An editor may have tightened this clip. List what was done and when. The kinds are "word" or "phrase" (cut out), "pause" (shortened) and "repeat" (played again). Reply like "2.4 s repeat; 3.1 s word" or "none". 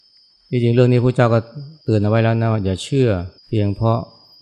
1.8 s pause; 3.4 s pause